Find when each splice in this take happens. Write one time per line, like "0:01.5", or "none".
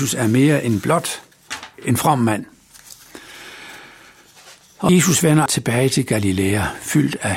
0:04.9
0:05.5